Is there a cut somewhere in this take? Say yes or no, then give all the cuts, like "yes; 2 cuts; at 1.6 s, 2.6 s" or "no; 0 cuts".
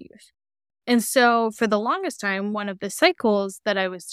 no; 0 cuts